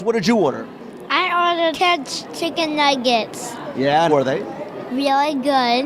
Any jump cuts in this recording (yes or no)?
yes